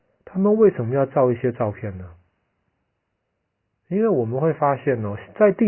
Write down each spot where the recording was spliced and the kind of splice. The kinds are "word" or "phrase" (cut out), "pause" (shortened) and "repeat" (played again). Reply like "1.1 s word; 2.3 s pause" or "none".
none